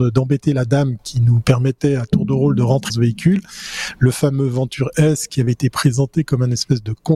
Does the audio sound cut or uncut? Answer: cut